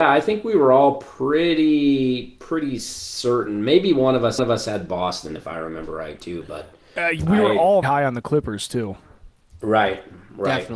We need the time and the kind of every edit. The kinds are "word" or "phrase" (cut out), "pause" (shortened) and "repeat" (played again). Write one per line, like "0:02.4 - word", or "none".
0:04.4 - repeat
0:07.8 - word